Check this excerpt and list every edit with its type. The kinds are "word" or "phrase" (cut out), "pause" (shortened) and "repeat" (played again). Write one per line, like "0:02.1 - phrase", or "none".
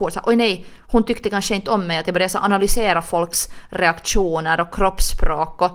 none